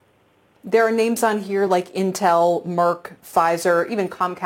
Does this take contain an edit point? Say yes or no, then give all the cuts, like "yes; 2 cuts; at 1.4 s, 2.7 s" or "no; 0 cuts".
no; 0 cuts